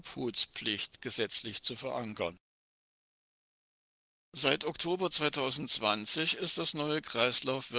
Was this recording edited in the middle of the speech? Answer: no; 0 cuts

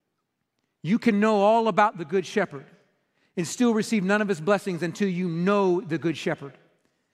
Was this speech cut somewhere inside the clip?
no; 0 cuts

